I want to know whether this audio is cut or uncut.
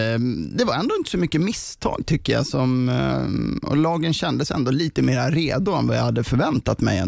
uncut